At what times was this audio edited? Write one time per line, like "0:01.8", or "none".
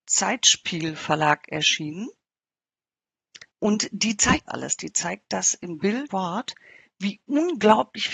0:03.5
0:04.5
0:06.1